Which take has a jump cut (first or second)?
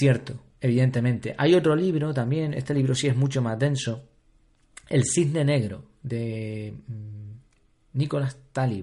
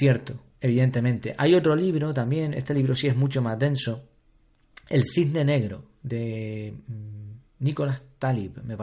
second